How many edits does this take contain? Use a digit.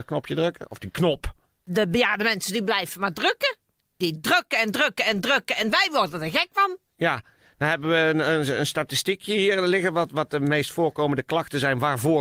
0